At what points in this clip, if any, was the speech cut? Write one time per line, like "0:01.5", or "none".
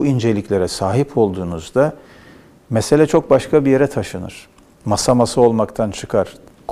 none